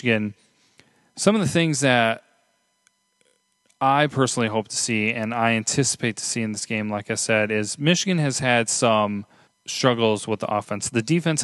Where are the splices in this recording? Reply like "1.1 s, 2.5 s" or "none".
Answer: 9.4 s